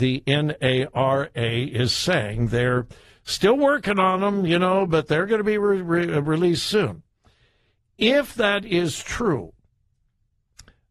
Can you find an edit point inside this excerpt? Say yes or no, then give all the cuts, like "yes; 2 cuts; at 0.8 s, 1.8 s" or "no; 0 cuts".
no; 0 cuts